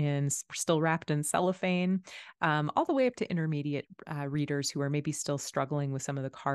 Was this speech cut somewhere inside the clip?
no; 0 cuts

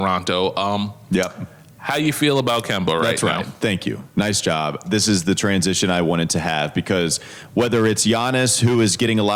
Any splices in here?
no; 0 cuts

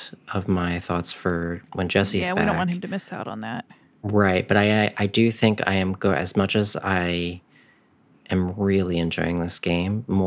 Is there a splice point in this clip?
no; 0 cuts

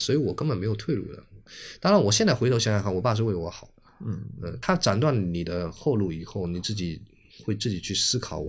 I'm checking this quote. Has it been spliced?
no; 0 cuts

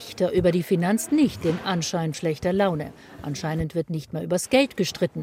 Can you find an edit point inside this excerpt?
yes; 2 cuts; at 1.1 s, 2.1 s

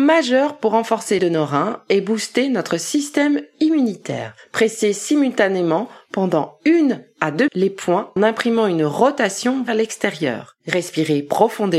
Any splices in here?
yes; 4 cuts; at 1.2 s, 7.5 s, 8.2 s, 9.7 s

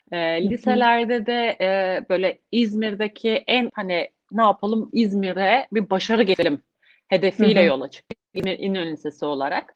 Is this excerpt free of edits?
no; 1 cut; at 3.7 s

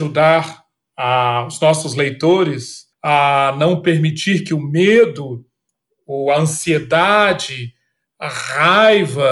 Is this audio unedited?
no; 1 cut; at 2.9 s

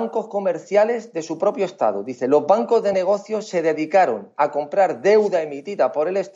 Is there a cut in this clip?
no; 0 cuts

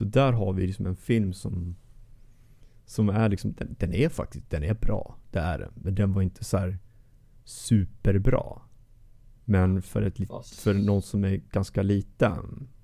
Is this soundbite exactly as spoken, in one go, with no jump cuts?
yes; 0 cuts

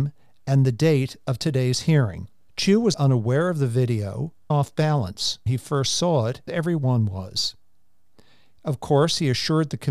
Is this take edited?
yes; 5 cuts; at 2.5 s, 2.9 s, 4.5 s, 5.5 s, 6.5 s

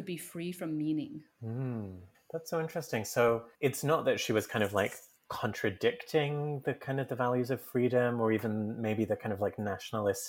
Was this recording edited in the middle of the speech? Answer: yes; 2 cuts; at 2.1 s, 3.5 s

